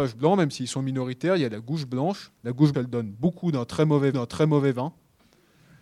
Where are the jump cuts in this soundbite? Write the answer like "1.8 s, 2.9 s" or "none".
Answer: 2.4 s, 2.7 s, 4.1 s

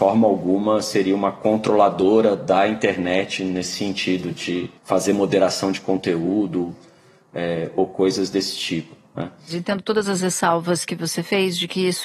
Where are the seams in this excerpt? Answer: 4.8 s

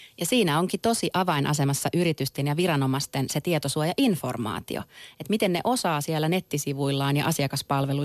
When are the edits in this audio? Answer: none

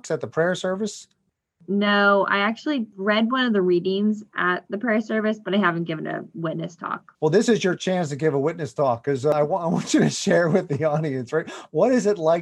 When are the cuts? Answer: 7.1 s

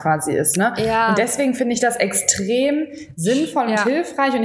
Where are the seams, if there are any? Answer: none

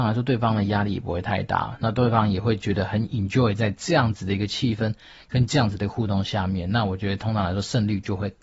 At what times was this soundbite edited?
none

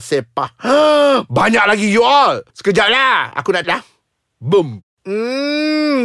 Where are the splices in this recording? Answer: 2.5 s, 3.6 s, 4.9 s

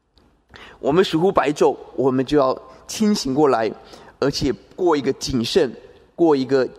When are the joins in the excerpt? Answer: none

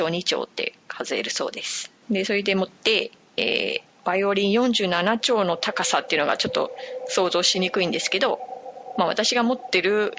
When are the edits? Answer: 2.0 s, 2.7 s

